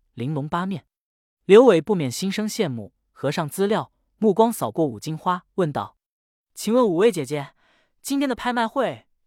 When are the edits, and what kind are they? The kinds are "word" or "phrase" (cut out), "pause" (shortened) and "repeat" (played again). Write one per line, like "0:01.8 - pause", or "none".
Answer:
0:05.5 - pause